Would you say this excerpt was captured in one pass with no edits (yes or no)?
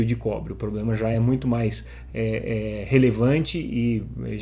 yes